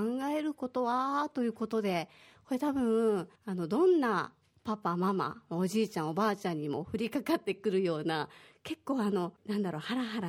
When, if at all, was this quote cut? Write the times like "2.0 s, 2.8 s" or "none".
3.4 s, 9.4 s